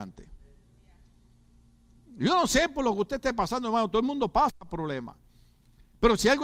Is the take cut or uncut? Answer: uncut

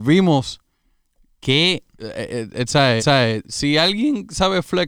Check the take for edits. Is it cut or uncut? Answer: cut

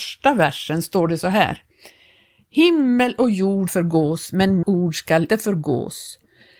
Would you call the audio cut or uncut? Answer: cut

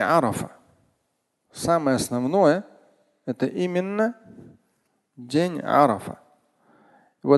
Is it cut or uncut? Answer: uncut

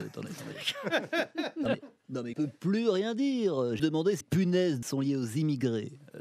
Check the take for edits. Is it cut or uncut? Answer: cut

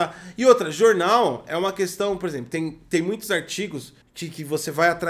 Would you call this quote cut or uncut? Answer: cut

